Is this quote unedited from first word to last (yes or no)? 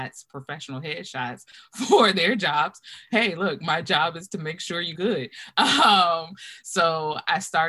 no